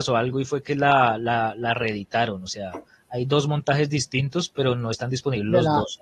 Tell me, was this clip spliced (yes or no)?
no